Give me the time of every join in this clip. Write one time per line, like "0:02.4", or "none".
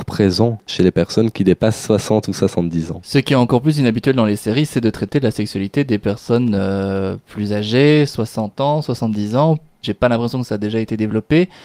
none